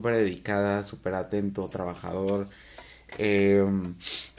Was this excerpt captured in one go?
yes; 0 cuts

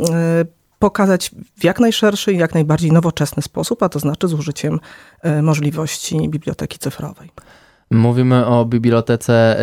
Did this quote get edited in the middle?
no; 0 cuts

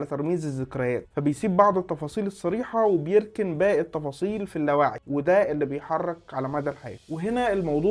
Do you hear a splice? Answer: no; 0 cuts

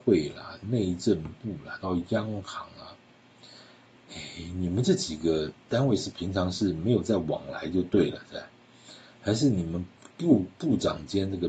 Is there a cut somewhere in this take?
no; 0 cuts

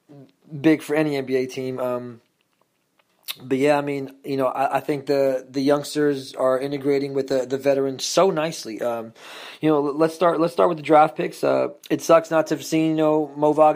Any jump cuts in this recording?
yes; 1 cut; at 11.8 s

